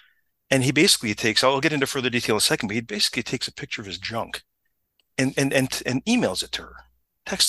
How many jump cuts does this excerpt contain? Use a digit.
0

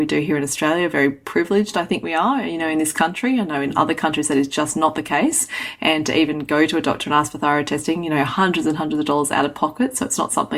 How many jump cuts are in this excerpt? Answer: 0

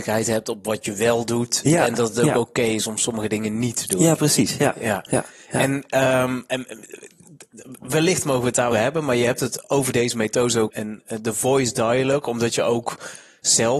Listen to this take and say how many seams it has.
2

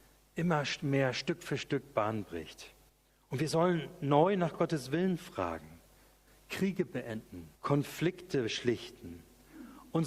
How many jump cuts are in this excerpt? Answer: 2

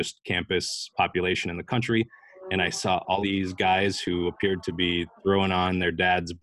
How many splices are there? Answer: 2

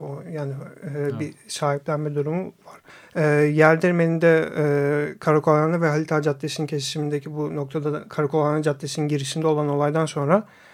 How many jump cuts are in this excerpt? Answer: 1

